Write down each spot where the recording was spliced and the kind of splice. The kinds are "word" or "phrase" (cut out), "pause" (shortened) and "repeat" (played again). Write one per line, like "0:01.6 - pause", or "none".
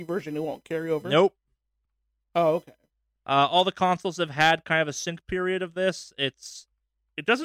none